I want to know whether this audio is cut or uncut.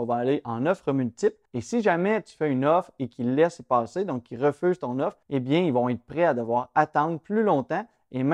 cut